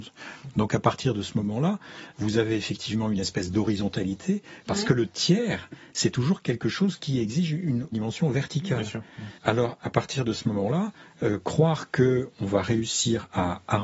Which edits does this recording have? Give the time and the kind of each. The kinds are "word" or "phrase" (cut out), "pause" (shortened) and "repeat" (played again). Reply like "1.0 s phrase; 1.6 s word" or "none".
2.1 s word; 7.9 s phrase; 9.4 s pause